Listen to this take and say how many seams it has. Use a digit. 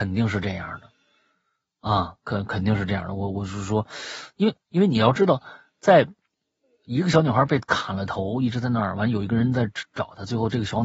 1